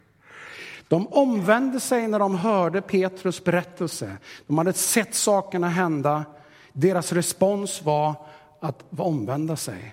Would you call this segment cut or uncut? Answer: uncut